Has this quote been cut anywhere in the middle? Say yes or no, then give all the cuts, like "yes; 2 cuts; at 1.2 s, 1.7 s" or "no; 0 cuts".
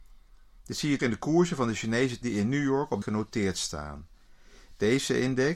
yes; 3 cuts; at 1.0 s, 2.2 s, 3.0 s